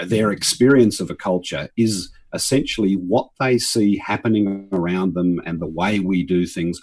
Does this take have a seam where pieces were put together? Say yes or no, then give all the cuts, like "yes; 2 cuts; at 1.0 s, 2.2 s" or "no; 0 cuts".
no; 0 cuts